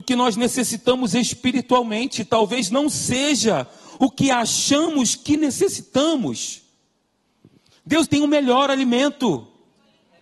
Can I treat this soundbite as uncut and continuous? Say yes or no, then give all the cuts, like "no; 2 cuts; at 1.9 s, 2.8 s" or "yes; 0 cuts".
no; 1 cut; at 8.0 s